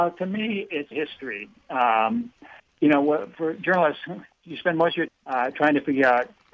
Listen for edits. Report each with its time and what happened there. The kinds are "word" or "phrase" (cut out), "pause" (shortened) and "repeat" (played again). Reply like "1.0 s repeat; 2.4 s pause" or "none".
0.9 s word; 2.6 s pause; 4.3 s pause; 5.1 s word